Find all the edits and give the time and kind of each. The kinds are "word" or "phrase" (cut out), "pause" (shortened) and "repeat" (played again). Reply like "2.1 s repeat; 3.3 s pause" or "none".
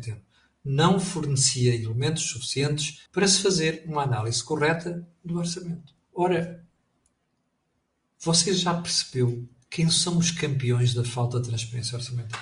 3.1 s pause; 6.0 s pause